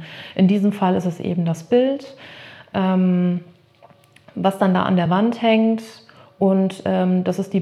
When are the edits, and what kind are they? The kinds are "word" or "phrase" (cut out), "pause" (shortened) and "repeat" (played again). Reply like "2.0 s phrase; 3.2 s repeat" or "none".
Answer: none